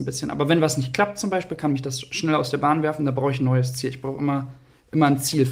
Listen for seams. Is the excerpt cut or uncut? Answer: uncut